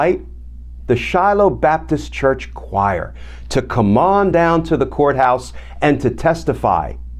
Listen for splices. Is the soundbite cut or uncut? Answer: uncut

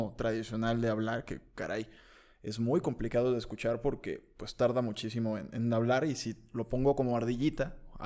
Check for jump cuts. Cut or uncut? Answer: uncut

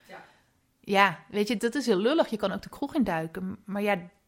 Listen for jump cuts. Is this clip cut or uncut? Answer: cut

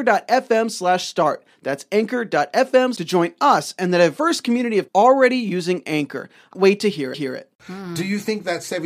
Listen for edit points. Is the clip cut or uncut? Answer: cut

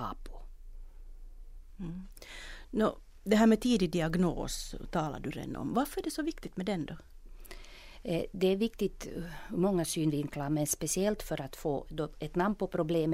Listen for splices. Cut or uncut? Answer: uncut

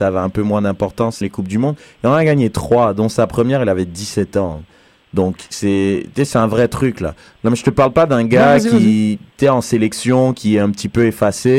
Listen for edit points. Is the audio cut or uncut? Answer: cut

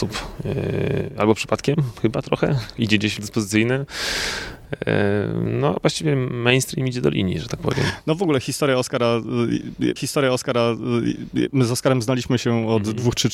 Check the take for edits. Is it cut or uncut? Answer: cut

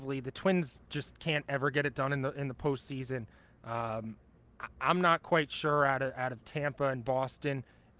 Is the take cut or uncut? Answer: uncut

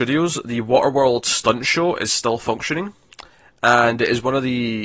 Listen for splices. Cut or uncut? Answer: uncut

